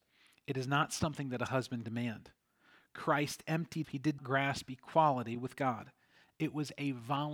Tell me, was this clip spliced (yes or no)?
yes